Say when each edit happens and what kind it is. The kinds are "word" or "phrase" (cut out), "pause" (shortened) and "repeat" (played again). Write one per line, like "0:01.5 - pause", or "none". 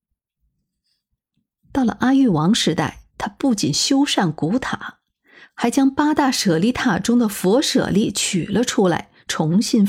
0:03.1 - pause